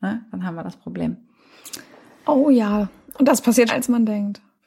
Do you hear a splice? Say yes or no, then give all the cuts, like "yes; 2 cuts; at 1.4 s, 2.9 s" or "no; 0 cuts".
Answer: yes; 1 cut; at 3.7 s